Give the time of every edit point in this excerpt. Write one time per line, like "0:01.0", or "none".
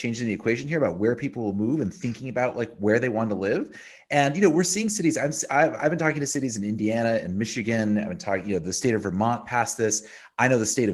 none